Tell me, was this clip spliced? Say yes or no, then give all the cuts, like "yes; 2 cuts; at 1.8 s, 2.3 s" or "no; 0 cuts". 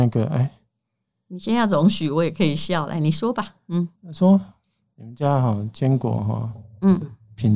yes; 1 cut; at 4.0 s